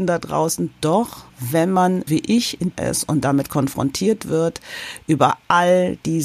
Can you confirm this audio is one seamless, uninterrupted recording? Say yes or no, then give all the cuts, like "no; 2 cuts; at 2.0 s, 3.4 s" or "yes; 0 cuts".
no; 3 cuts; at 1.3 s, 2.1 s, 2.7 s